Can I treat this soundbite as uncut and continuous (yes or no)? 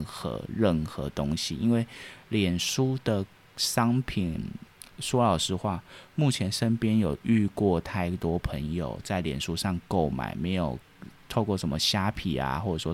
yes